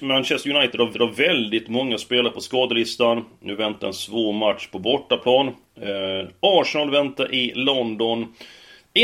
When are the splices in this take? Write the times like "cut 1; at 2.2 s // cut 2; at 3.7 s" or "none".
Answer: cut 1; at 0.9 s